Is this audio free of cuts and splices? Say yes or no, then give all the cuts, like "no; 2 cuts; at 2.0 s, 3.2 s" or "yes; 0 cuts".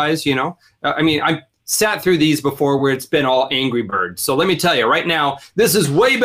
yes; 0 cuts